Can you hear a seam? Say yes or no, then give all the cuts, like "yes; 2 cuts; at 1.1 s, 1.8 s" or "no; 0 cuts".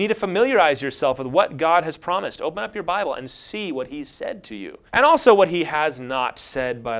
yes; 1 cut; at 4.9 s